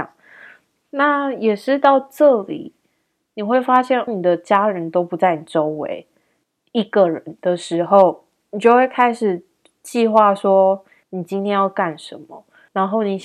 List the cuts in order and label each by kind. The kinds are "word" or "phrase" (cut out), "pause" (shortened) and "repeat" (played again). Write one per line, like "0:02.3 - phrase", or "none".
0:04.1 - word